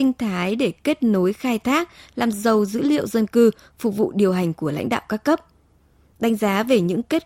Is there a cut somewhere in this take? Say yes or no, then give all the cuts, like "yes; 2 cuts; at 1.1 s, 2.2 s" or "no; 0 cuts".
no; 0 cuts